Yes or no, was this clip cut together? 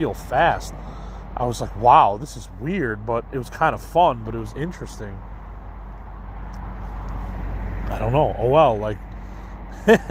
no